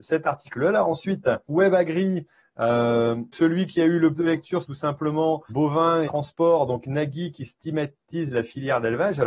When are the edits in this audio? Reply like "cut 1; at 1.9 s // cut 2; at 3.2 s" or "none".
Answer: cut 1; at 1.5 s // cut 2; at 3.3 s // cut 3; at 4.1 s // cut 4; at 4.6 s // cut 5; at 5.5 s // cut 6; at 6.0 s

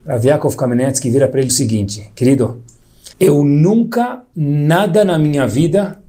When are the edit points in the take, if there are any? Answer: cut 1; at 1.5 s // cut 2; at 3.1 s // cut 3; at 4.3 s

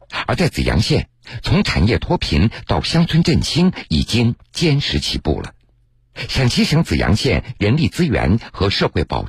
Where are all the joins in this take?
cut 1; at 5.9 s

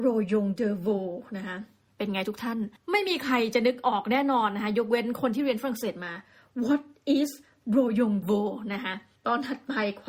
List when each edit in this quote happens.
cut 1; at 8.2 s

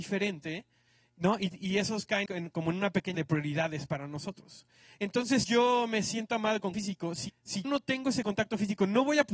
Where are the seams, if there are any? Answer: cut 1; at 2.3 s // cut 2; at 3.1 s // cut 3; at 5.4 s // cut 4; at 6.7 s // cut 5; at 7.3 s // cut 6; at 7.6 s

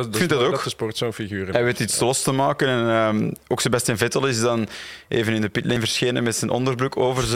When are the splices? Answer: none

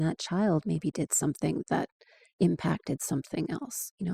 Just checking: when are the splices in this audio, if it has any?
none

